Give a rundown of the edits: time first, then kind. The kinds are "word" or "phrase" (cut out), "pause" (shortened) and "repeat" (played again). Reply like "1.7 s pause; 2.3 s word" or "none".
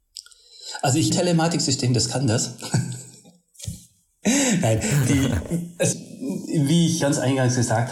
1.1 s phrase; 5.0 s word; 5.9 s word; 7.0 s phrase